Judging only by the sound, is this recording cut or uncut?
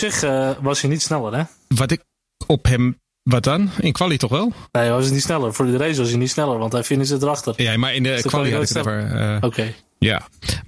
cut